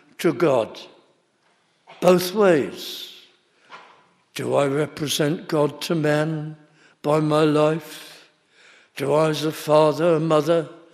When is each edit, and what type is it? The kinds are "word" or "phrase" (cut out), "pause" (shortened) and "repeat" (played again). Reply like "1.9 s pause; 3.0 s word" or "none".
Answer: none

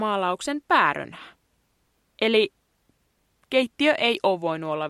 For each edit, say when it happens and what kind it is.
none

